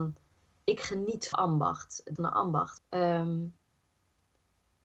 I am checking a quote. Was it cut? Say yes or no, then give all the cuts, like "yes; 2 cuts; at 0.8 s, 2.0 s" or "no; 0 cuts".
yes; 3 cuts; at 1.3 s, 2.2 s, 2.8 s